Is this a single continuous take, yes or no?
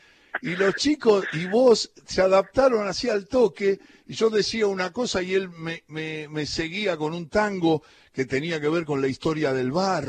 yes